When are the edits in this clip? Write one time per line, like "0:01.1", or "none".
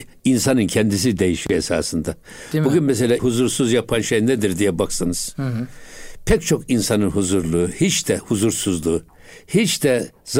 0:03.2